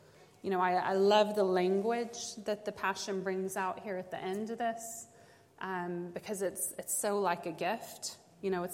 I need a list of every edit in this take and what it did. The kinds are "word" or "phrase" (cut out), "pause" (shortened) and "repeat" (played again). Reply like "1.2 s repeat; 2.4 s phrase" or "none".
none